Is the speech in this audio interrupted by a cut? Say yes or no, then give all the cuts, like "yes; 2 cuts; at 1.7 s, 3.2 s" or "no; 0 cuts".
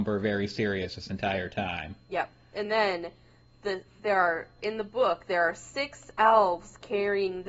no; 0 cuts